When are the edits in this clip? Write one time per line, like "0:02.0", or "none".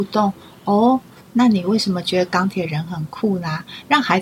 none